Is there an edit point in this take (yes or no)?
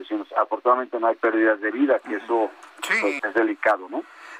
yes